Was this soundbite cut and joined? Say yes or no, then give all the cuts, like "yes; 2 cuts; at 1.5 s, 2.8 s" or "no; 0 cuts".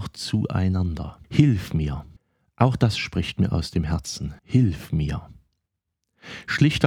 yes; 3 cuts; at 1.2 s, 2.2 s, 4.4 s